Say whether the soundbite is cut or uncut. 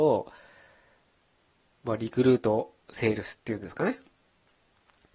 cut